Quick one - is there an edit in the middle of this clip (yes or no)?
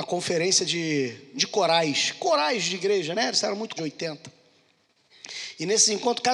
yes